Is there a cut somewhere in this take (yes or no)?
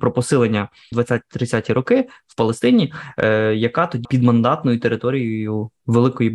yes